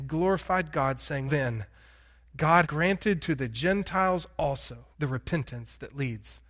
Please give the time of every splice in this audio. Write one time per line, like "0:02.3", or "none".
0:01.3
0:02.6
0:04.9